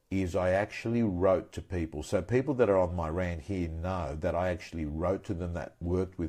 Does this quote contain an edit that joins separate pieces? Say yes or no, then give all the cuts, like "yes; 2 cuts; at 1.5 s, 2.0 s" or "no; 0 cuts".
no; 0 cuts